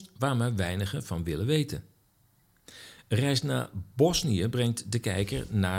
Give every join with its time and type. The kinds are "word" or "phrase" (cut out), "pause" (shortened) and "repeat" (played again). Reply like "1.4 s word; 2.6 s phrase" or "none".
none